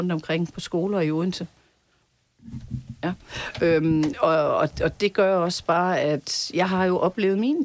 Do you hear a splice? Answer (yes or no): no